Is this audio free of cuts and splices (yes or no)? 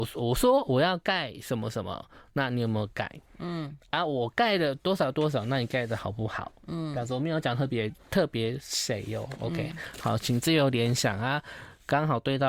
yes